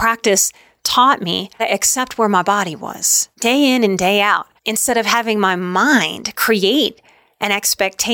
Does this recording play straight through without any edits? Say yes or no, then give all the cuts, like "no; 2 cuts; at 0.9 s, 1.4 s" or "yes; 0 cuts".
no; 3 cuts; at 1.6 s, 3.3 s, 4.6 s